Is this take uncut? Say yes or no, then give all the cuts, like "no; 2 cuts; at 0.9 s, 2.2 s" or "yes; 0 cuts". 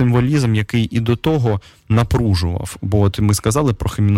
yes; 0 cuts